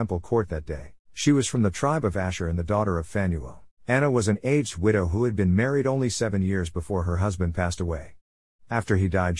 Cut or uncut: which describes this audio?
cut